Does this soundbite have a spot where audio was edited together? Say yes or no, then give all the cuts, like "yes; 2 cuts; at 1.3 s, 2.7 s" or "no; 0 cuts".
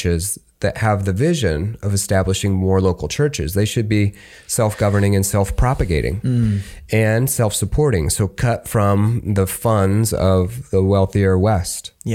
no; 0 cuts